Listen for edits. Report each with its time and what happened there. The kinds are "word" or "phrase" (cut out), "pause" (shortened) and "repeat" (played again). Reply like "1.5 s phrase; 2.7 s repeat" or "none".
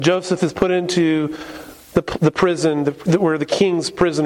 1.8 s pause